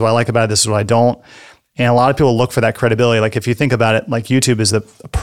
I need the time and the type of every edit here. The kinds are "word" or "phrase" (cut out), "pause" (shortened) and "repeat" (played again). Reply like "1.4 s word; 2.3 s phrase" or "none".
none